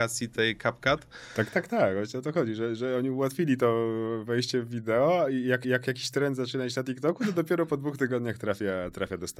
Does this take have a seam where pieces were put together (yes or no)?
yes